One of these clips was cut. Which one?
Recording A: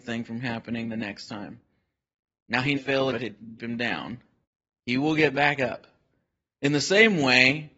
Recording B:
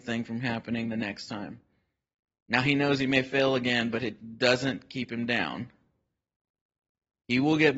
A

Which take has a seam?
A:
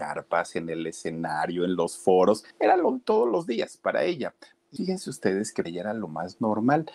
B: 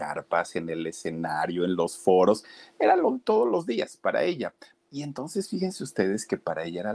A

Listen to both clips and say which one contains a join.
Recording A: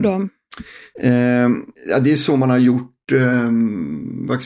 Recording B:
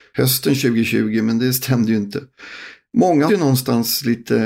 B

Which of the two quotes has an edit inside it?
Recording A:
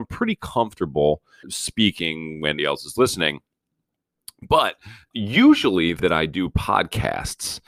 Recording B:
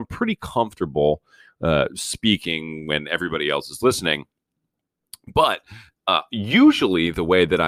A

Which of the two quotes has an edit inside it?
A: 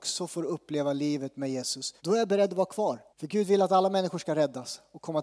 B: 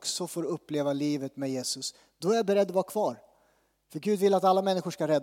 A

